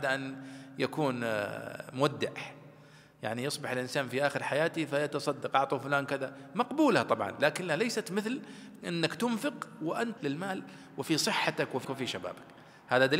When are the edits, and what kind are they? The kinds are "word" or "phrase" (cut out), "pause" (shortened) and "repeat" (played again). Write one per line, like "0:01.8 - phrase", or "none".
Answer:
0:10.2 - word
0:11.8 - word